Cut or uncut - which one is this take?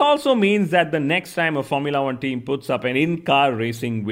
uncut